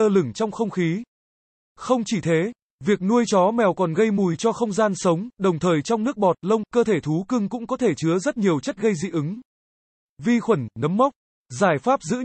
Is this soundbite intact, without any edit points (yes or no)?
yes